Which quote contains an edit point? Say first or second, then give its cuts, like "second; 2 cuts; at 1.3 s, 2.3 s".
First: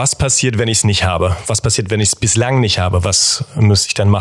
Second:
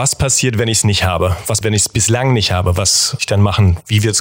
second; 2 cuts; at 1.6 s, 3.2 s